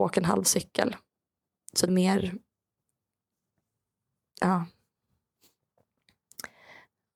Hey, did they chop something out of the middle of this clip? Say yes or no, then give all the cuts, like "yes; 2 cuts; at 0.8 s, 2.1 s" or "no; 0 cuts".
yes; 1 cut; at 1.9 s